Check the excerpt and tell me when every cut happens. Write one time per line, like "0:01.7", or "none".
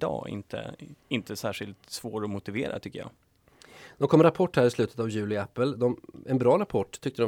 0:01.0